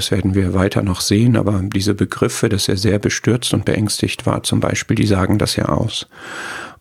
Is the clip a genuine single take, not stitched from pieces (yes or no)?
yes